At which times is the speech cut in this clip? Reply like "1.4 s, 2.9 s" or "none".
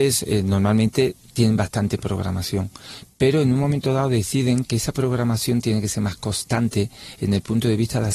none